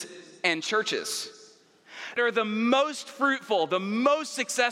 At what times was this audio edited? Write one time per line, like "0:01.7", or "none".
0:02.2

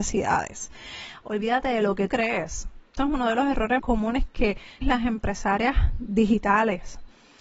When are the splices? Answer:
0:02.1
0:03.0
0:03.8
0:04.8

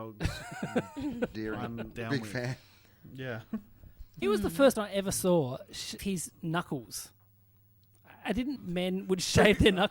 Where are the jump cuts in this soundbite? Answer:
0:01.3
0:01.9
0:04.2
0:04.7
0:06.0
0:08.6

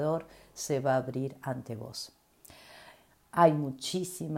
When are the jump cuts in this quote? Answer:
none

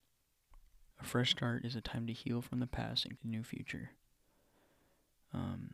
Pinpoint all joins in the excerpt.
0:00.9
0:03.2

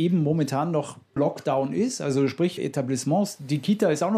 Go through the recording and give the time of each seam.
0:01.2
0:02.6

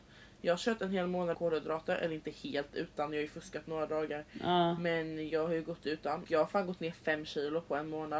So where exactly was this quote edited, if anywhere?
0:01.3
0:06.2

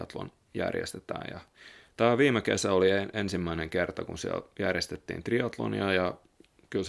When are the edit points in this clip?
none

